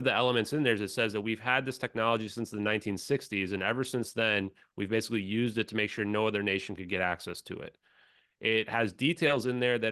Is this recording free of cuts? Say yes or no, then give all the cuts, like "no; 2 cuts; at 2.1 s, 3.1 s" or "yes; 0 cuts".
yes; 0 cuts